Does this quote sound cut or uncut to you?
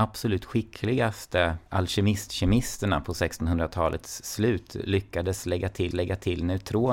cut